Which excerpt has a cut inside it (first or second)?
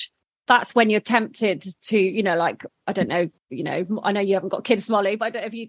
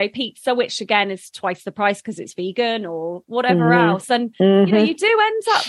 first